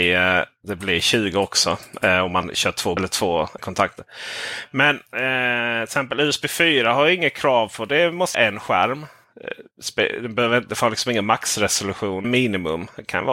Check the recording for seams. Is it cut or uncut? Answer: cut